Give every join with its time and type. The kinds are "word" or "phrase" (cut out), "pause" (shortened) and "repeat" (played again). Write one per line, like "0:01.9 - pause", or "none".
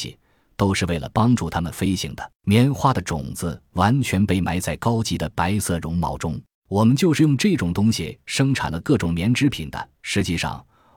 0:02.4 - pause
0:06.5 - pause
0:10.0 - pause